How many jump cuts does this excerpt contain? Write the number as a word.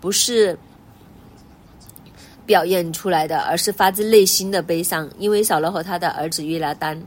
one